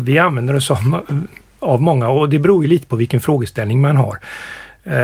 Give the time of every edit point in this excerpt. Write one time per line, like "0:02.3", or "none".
none